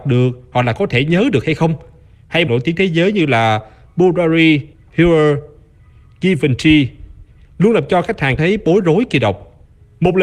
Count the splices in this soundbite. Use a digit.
4